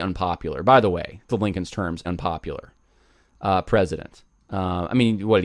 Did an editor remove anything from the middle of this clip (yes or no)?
yes